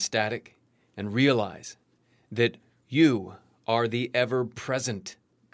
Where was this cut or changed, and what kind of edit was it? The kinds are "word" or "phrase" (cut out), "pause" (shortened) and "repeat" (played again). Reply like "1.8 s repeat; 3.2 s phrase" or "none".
none